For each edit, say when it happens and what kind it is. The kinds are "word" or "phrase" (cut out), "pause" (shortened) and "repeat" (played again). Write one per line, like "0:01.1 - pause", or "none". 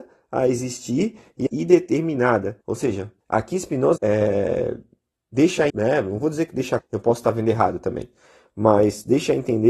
0:01.5 - phrase
0:02.6 - pause
0:03.2 - pause
0:04.0 - word
0:05.7 - word
0:06.8 - phrase